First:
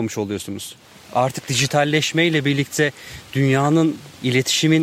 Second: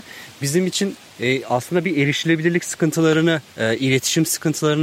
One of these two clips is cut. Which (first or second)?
second